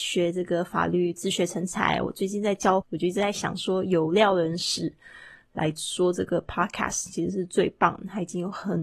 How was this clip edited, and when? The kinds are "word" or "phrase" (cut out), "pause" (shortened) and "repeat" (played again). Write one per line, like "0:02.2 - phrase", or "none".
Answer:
0:02.8 - word